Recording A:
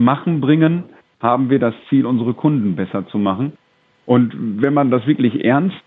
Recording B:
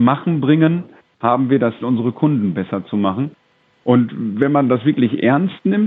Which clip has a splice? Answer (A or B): B